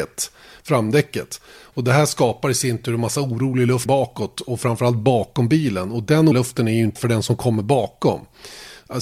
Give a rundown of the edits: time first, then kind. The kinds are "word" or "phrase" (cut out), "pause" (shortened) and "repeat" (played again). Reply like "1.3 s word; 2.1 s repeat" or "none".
3.9 s word; 6.3 s word; 7.0 s word